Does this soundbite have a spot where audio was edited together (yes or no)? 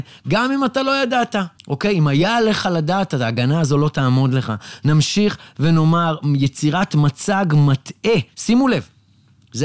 yes